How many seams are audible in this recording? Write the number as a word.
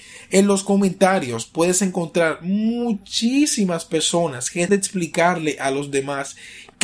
one